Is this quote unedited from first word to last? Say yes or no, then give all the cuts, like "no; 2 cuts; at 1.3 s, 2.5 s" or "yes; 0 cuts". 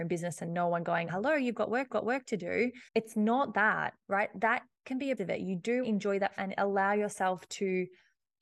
no; 7 cuts; at 1.1 s, 1.9 s, 2.9 s, 4.0 s, 5.2 s, 5.8 s, 6.4 s